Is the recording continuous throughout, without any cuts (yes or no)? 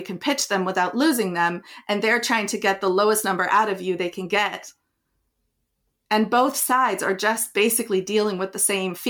yes